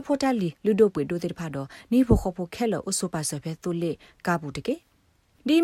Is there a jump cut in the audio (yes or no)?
no